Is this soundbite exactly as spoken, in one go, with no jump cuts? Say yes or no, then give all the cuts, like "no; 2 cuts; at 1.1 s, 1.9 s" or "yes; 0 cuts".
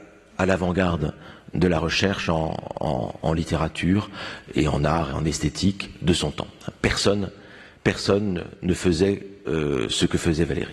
yes; 0 cuts